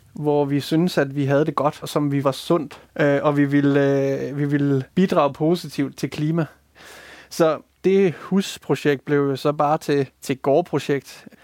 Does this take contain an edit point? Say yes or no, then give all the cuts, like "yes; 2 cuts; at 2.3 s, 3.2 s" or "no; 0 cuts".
yes; 4 cuts; at 1.8 s, 2.2 s, 2.9 s, 4.9 s